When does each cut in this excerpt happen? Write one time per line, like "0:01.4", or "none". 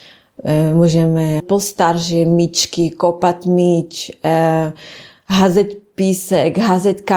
0:01.4